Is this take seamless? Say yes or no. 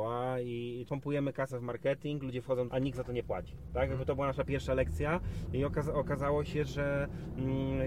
no